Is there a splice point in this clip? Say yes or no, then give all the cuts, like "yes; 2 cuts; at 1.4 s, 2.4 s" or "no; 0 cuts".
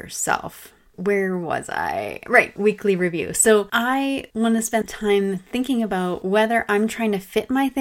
yes; 2 cuts; at 2.6 s, 4.8 s